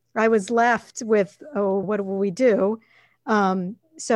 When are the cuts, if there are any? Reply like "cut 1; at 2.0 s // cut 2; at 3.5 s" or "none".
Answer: cut 1; at 1.8 s